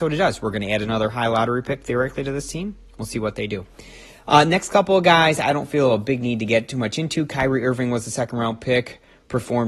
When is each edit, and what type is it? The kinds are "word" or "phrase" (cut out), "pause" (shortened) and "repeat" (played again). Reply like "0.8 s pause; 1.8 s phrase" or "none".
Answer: none